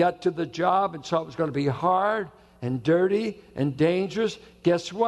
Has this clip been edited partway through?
no; 0 cuts

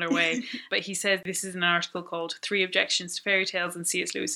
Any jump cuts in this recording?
no; 0 cuts

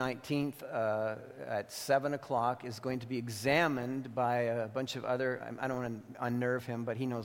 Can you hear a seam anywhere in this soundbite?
no; 0 cuts

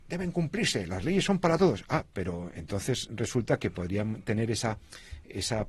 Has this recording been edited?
no; 0 cuts

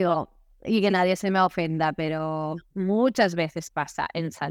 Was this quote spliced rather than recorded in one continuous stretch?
no; 0 cuts

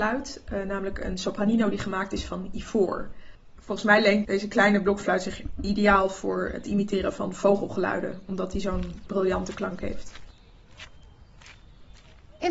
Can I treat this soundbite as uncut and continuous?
yes; 0 cuts

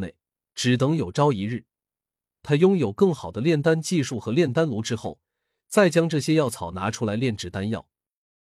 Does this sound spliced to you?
no; 0 cuts

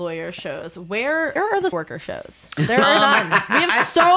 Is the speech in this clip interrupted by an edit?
yes; 2 cuts; at 1.4 s, 1.7 s

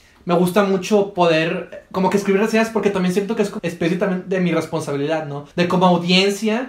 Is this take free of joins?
no; 2 cuts; at 3.6 s, 5.5 s

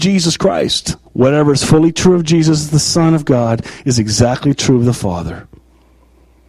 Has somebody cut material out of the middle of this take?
yes; 1 cut; at 1.1 s

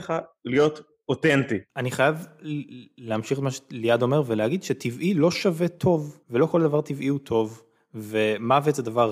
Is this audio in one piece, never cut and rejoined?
no; 2 cuts; at 1.7 s, 6.2 s

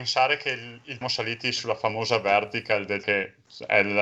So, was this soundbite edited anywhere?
yes; 2 cuts; at 1.0 s, 3.0 s

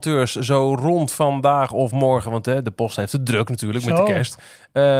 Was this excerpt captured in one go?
yes; 0 cuts

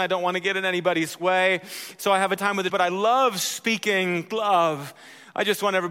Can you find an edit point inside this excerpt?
yes; 2 cuts; at 2.4 s, 2.7 s

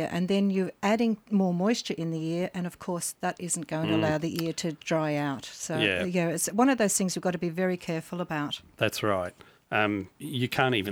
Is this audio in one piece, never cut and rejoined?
yes; 0 cuts

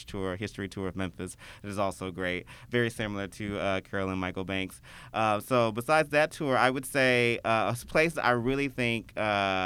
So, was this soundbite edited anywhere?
no; 0 cuts

